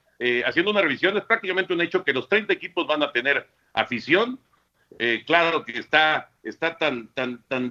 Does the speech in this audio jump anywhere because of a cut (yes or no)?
no